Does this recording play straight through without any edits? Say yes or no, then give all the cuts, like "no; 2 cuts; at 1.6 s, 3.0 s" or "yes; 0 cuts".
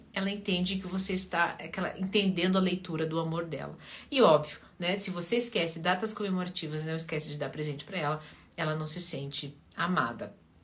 yes; 0 cuts